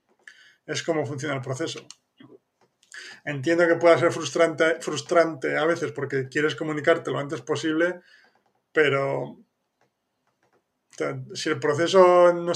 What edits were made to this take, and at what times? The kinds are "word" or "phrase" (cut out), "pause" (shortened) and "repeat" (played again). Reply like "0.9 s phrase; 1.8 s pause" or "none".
none